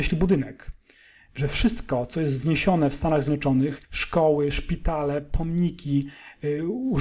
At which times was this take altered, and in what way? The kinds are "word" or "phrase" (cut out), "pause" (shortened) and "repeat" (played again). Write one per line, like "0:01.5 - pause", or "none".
0:03.8 - pause